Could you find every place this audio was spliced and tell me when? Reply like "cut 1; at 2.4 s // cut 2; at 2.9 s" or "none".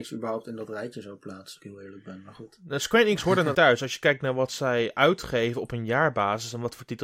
cut 1; at 1.6 s // cut 2; at 3.5 s